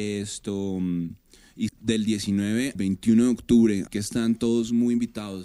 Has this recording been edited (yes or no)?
yes